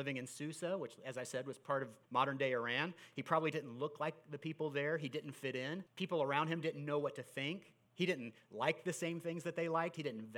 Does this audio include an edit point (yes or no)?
yes